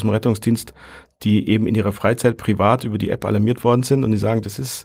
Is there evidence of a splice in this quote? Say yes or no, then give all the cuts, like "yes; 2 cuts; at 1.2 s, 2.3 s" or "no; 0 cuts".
no; 0 cuts